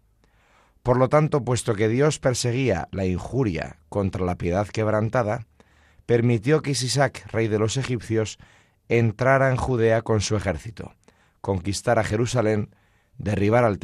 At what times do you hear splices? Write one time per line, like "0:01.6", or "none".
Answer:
none